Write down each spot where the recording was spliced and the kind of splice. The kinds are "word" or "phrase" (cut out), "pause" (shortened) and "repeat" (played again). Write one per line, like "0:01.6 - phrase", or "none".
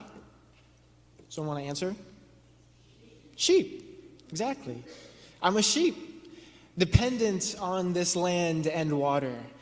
none